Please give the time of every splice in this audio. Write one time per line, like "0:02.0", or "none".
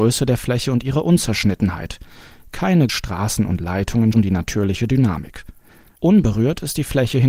0:02.9
0:04.1

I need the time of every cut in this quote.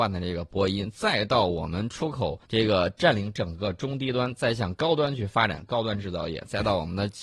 0:02.5

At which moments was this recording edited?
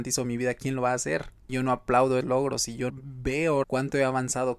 0:02.2
0:02.9
0:03.6

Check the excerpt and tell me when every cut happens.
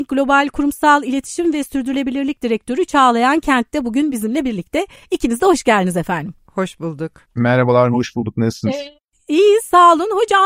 none

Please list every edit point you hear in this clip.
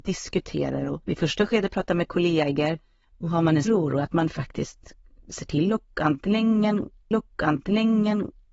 0:01.0
0:03.7
0:07.1

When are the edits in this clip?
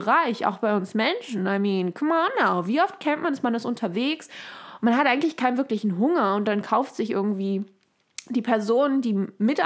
none

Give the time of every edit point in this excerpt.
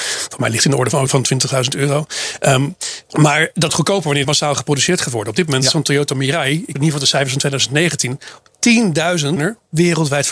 0:01.1
0:03.1
0:03.7
0:04.2
0:06.7
0:09.4

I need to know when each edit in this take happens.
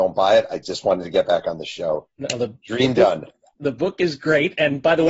none

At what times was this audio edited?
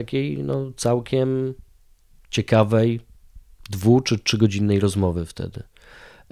none

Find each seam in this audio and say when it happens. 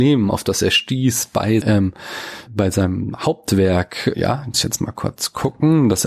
0:01.6
0:02.5
0:04.1
0:04.5

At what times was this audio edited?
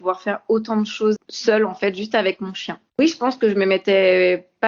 0:01.2
0:02.9

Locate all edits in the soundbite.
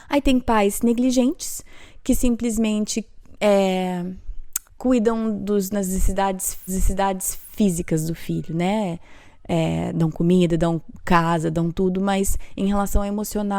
0:04.7
0:06.7

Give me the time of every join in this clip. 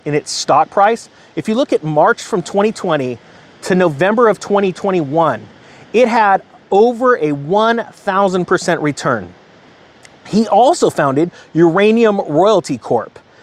none

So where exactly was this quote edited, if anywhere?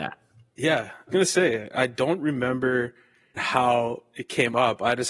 0:01.1
0:03.4

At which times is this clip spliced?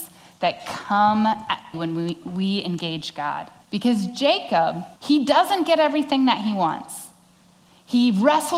0:01.7
0:03.6
0:05.0

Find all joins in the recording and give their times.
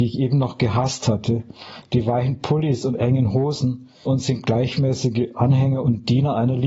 0:04.1

